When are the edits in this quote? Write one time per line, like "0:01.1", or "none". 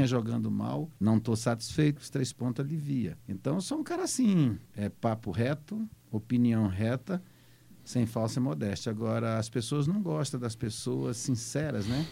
0:01.0
0:02.0
0:03.2
0:04.7